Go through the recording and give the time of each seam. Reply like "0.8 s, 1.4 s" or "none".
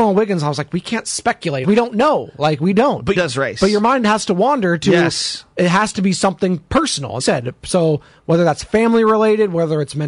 1.6 s, 3.1 s, 7.2 s